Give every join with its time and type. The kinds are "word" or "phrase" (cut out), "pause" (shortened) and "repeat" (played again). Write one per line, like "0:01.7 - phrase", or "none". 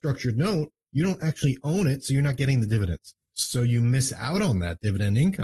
0:03.2 - pause